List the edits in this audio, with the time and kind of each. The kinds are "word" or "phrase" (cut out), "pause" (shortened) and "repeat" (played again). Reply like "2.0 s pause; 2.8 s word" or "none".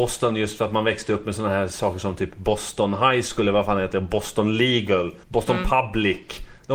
5.2 s pause